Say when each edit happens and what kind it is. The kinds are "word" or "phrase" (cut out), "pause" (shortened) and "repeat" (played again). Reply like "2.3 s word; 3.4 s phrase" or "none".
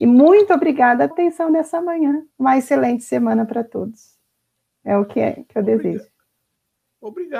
1.1 s word; 2.3 s pause